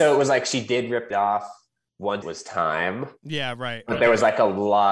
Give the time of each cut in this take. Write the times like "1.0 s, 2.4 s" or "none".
1.1 s, 2.2 s